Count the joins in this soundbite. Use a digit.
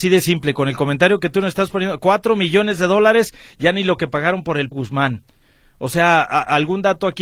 1